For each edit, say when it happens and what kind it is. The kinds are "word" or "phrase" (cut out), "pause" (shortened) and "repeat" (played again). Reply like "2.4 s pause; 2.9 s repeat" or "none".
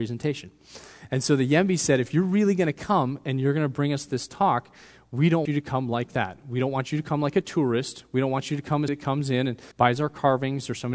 5.5 s word; 8.9 s word; 9.7 s pause